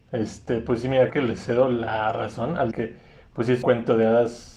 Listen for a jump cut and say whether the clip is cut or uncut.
cut